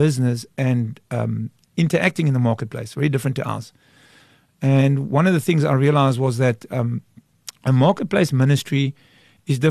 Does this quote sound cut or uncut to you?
uncut